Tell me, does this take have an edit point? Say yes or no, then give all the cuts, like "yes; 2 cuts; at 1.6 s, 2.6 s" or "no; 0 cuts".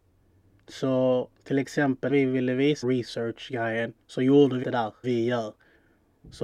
yes; 5 cuts; at 2.1 s, 2.8 s, 4.0 s, 4.6 s, 5.0 s